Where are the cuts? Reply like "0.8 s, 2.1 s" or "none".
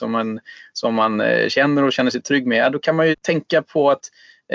3.1 s